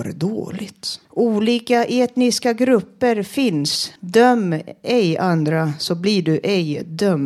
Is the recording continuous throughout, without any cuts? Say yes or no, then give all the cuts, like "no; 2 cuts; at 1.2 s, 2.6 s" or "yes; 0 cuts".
no; 2 cuts; at 1.0 s, 4.0 s